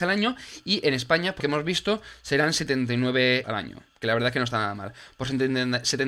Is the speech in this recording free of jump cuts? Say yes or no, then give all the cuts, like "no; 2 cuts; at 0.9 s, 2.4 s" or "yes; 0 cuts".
no; 2 cuts; at 1.4 s, 3.4 s